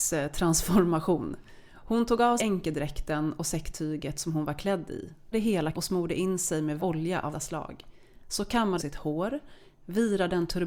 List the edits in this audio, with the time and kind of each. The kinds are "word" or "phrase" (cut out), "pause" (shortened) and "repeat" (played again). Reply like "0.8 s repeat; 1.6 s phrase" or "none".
2.4 s word; 5.3 s word; 5.7 s word; 6.8 s word; 7.3 s word; 8.8 s word